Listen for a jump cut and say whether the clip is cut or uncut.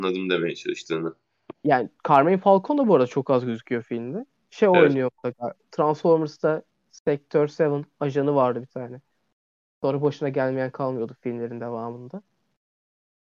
uncut